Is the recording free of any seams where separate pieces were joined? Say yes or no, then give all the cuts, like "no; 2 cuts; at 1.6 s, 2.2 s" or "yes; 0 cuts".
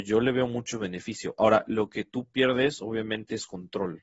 yes; 0 cuts